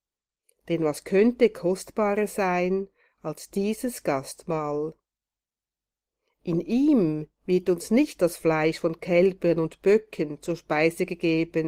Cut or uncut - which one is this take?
uncut